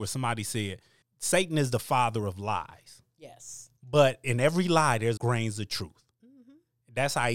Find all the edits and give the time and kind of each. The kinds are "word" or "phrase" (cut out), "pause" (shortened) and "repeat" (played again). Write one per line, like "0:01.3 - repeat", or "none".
0:01.0 - pause
0:03.8 - pause
0:05.2 - word